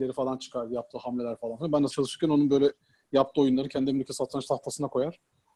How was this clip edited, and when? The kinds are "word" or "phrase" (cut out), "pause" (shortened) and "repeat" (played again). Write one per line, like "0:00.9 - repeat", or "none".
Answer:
0:01.9 - phrase